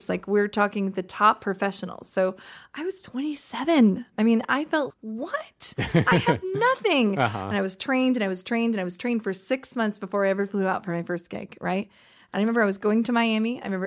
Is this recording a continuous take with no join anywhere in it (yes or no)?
no